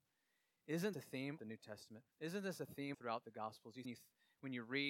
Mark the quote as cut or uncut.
cut